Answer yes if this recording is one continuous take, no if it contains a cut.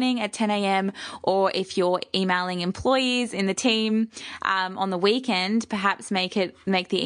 yes